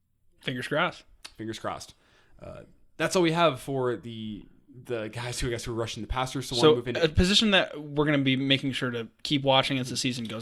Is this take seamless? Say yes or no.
yes